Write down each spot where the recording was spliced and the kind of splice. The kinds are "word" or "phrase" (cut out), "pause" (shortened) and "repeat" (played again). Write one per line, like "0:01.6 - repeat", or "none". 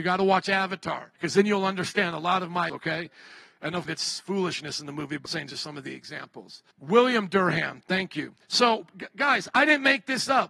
0:01.2 - pause
0:02.7 - word
0:03.9 - phrase
0:05.3 - word
0:06.7 - pause
0:08.4 - pause